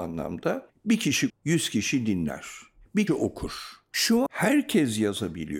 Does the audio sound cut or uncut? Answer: cut